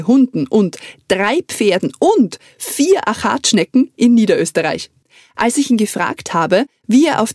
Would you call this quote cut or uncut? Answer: uncut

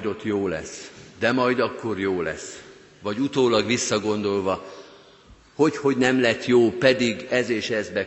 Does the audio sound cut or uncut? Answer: uncut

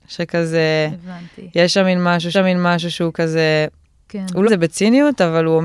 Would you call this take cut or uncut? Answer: cut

